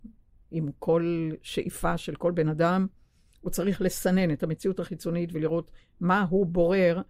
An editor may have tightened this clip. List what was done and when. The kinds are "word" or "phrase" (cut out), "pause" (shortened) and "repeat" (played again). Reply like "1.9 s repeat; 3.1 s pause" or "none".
none